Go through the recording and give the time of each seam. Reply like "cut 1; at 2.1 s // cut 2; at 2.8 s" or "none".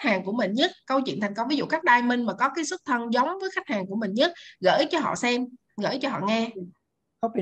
none